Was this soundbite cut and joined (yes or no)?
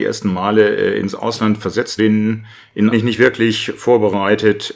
yes